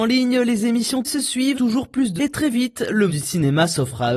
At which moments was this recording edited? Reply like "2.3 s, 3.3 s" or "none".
1.0 s, 1.5 s, 2.2 s, 3.1 s